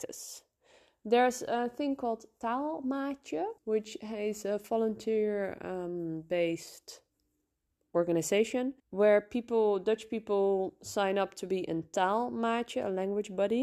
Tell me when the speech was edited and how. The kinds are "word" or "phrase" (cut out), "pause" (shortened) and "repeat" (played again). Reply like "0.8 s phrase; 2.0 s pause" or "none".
3.6 s pause; 8.8 s pause